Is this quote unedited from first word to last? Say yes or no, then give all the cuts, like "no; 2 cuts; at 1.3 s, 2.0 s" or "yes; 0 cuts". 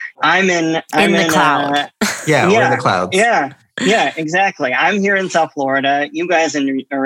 yes; 0 cuts